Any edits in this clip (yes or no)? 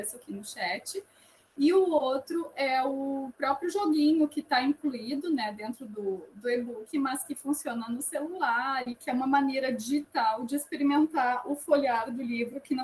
no